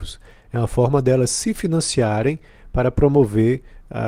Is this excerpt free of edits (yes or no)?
yes